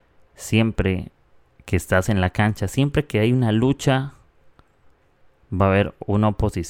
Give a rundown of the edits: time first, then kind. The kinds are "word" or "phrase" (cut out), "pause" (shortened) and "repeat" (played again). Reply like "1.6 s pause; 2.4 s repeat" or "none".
none